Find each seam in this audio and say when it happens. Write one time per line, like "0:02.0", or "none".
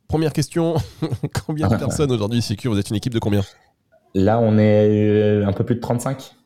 none